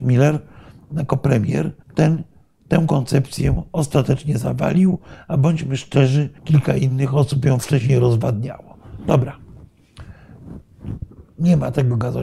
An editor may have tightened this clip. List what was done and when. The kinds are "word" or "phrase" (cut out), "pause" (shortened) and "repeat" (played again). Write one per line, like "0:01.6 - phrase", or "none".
0:01.8 - pause
0:06.4 - pause
0:11.3 - pause